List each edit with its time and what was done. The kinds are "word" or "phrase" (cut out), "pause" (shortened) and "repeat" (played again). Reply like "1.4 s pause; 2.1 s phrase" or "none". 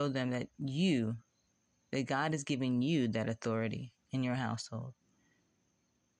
none